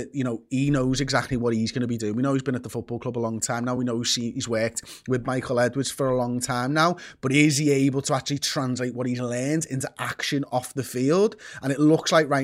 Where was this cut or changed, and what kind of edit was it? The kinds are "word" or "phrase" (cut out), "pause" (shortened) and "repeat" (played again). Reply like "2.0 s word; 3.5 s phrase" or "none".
none